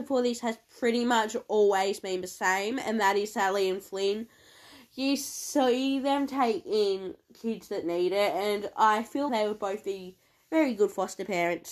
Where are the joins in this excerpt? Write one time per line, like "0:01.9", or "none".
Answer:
0:09.3